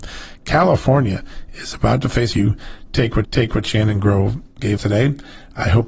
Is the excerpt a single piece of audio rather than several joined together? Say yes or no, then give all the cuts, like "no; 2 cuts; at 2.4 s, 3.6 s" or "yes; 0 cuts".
no; 3 cuts; at 2.3 s, 3.2 s, 4.8 s